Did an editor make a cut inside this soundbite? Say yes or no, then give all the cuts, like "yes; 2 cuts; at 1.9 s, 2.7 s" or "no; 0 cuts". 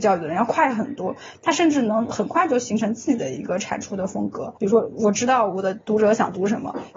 yes; 1 cut; at 4.6 s